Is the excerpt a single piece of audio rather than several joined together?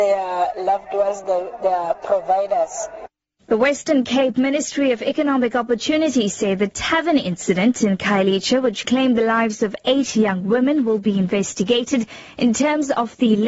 yes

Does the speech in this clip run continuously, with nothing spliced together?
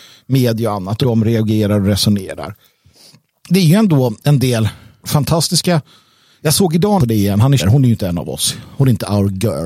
no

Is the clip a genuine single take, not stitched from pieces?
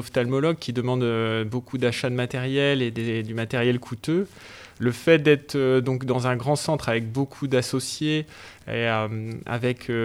yes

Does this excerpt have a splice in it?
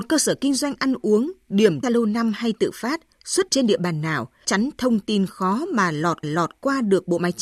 yes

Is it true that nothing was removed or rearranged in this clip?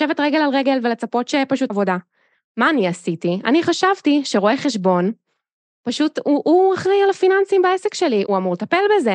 no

